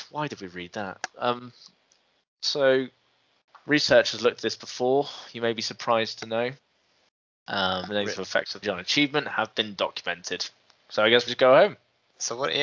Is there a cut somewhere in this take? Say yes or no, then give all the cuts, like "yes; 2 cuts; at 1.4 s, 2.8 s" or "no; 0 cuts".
yes; 3 cuts; at 7.9 s, 8.6 s, 11.3 s